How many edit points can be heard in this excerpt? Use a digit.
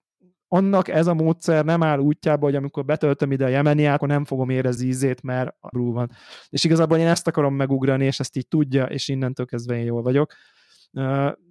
3